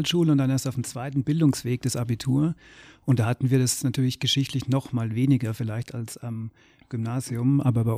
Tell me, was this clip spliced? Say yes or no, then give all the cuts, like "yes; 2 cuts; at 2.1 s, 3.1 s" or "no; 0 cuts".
no; 0 cuts